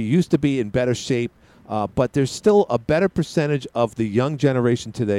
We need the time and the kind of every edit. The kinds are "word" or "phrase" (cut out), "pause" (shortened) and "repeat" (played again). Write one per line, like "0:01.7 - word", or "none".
none